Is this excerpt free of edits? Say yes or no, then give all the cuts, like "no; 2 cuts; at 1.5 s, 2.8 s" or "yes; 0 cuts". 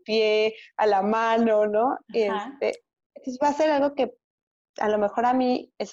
yes; 0 cuts